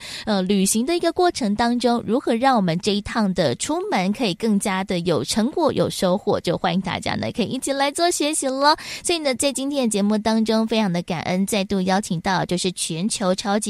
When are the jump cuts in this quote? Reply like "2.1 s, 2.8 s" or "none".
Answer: none